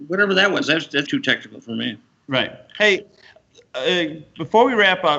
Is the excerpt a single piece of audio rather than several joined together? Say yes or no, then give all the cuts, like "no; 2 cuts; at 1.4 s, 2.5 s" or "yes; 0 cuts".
no; 1 cut; at 1.1 s